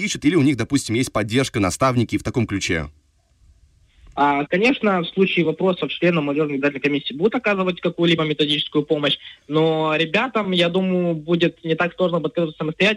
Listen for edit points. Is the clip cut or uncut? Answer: uncut